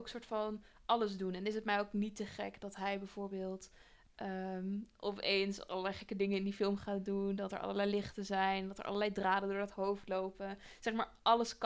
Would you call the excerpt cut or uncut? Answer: uncut